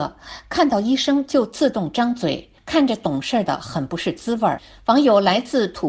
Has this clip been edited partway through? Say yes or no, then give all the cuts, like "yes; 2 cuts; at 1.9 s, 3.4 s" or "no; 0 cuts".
no; 0 cuts